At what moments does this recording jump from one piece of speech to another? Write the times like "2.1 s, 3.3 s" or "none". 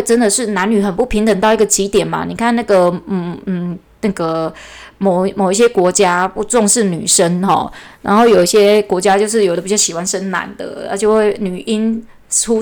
none